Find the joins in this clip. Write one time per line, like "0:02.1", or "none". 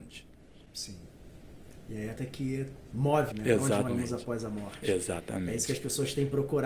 0:02.2
0:03.3
0:03.9